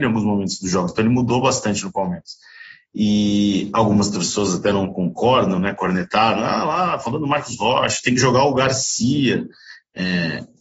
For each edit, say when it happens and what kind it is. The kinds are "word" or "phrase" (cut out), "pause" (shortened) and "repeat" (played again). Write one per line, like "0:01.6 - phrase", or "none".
none